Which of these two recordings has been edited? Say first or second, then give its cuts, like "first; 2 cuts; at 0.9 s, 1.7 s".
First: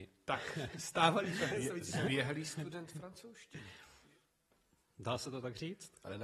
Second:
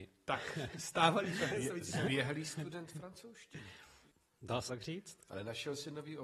second; 2 cuts; at 4.1 s, 4.7 s